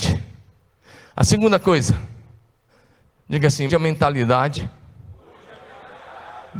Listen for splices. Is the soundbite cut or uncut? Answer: cut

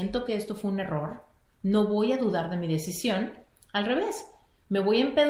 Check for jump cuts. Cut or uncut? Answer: uncut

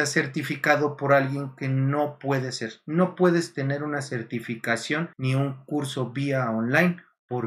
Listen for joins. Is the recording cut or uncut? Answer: cut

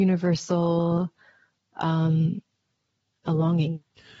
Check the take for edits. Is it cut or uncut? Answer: cut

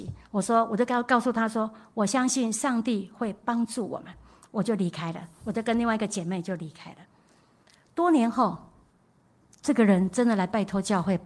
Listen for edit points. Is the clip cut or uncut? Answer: uncut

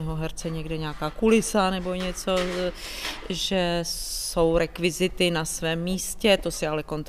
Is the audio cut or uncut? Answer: uncut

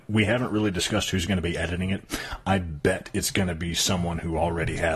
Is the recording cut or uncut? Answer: uncut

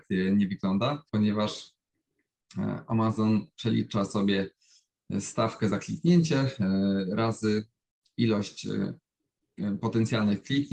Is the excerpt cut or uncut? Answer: cut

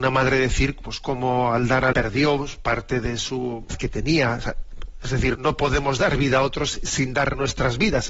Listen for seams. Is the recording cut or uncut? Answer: cut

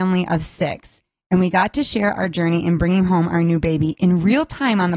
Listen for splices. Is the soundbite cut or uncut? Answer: uncut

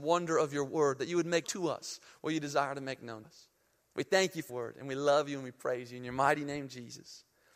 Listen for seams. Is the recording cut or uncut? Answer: cut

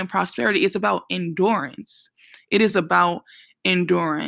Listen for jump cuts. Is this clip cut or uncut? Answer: uncut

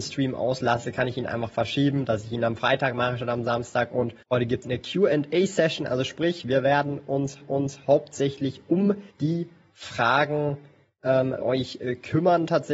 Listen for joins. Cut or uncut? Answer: cut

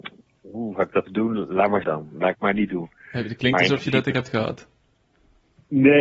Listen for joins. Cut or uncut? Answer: cut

